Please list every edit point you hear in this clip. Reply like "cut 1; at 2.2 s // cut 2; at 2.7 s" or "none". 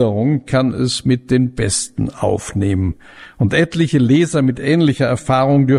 none